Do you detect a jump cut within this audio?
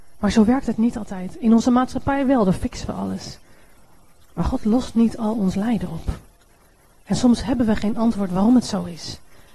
no; 0 cuts

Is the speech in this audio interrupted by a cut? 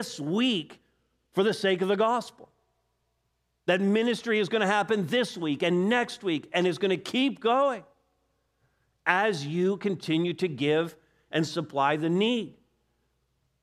no; 0 cuts

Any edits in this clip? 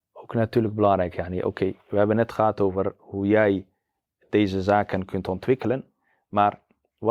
no; 0 cuts

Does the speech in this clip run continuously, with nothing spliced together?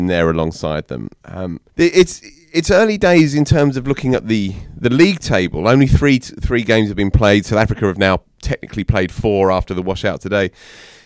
no; 1 cut; at 1.7 s

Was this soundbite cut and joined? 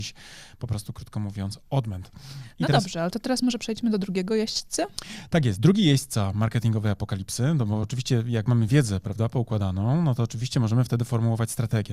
no; 0 cuts

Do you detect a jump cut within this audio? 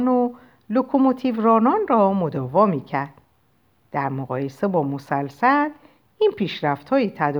no; 0 cuts

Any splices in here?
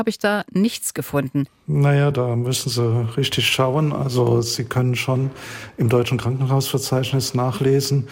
no; 0 cuts

